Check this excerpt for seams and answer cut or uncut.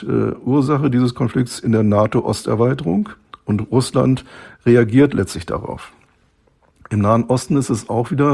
uncut